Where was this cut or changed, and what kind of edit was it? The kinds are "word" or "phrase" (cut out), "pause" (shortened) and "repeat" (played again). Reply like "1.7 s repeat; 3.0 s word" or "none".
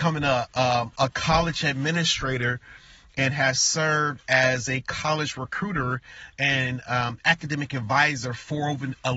none